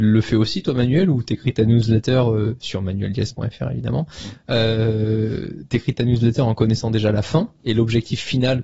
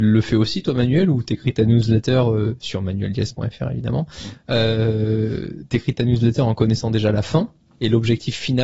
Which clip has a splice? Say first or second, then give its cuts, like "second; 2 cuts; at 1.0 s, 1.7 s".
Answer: first; 1 cut; at 7.6 s